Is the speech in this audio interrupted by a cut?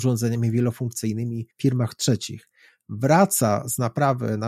yes; 1 cut; at 1.5 s

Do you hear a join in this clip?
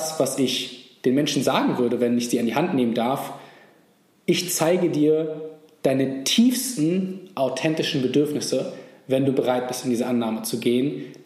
no; 0 cuts

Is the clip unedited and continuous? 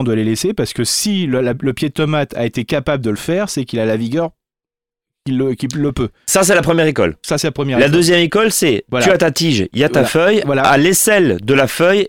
yes; 0 cuts

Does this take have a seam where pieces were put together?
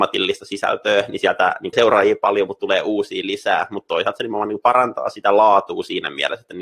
yes; 1 cut; at 1.7 s

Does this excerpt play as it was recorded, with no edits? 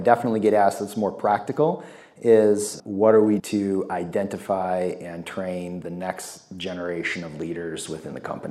no; 2 cuts; at 2.8 s, 3.4 s

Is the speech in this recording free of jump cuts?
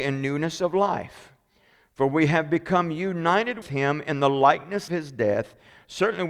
no; 2 cuts; at 3.6 s, 4.9 s

